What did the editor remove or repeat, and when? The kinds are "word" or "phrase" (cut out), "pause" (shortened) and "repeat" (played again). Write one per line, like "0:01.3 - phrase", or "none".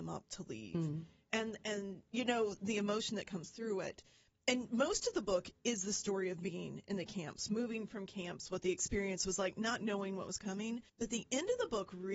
0:10.9 - pause

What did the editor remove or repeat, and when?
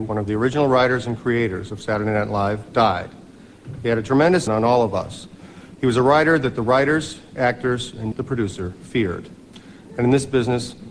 0:04.5 - phrase
0:08.1 - word

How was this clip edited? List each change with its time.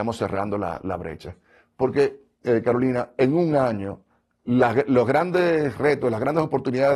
none

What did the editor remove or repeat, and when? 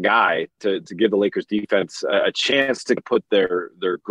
0:03.0 - word

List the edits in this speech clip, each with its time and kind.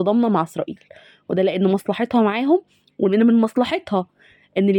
none

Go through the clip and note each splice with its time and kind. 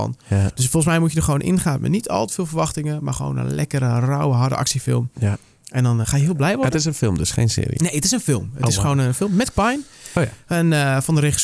0:06.0 - word
0:09.5 - word

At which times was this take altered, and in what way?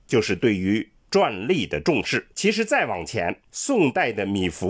0:02.3 - pause
0:03.5 - pause

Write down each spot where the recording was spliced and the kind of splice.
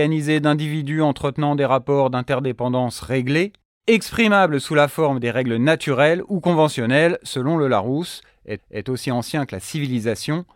0:08.6 - repeat

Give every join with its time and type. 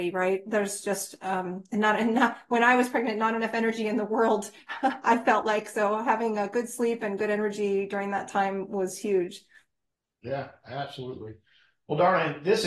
none

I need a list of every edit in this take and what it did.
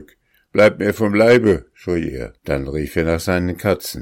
0:02.4 - pause

